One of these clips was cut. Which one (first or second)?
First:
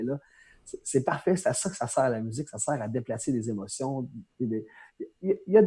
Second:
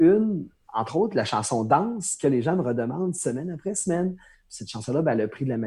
first